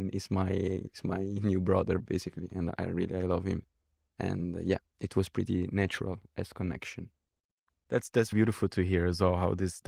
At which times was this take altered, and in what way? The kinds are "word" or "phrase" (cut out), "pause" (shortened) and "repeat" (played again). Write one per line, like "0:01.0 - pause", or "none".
0:08.3 - word